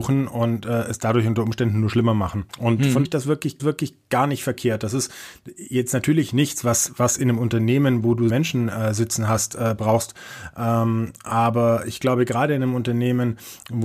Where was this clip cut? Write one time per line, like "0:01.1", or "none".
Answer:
0:02.5
0:03.0
0:03.6
0:08.3

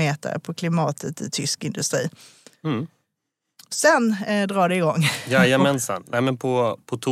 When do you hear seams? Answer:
none

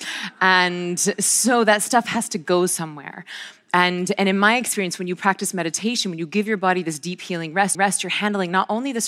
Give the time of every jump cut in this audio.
0:07.7

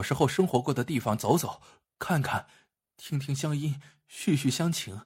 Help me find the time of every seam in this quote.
none

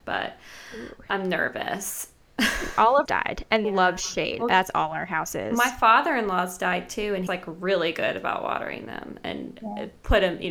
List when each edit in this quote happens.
0:03.1
0:03.6
0:04.4
0:07.3

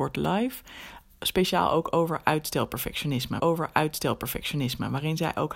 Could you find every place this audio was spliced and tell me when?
0:03.4

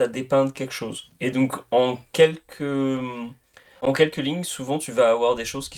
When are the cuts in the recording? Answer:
none

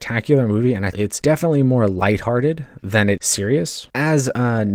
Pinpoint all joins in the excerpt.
0:00.9
0:03.2

